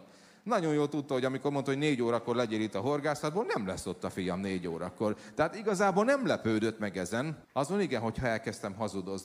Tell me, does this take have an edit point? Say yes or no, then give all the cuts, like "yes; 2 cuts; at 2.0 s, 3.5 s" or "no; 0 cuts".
yes; 1 cut; at 7.4 s